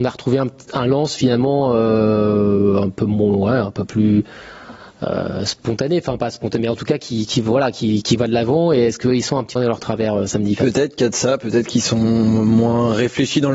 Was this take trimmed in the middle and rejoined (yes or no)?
yes